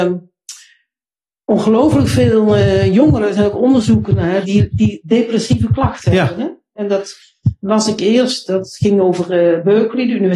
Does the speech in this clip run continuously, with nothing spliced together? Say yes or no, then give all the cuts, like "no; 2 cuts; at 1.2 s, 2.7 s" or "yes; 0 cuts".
no; 1 cut; at 4.4 s